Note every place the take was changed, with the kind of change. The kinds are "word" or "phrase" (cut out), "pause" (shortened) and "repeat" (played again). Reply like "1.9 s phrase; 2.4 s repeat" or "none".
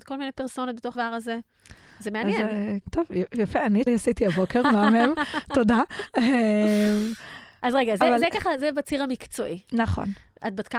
0.9 s word; 2.8 s word; 3.9 s word